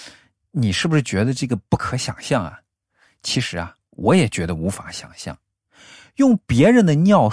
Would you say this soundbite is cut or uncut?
uncut